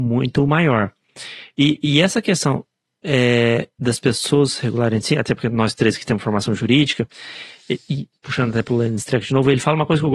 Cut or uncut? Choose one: uncut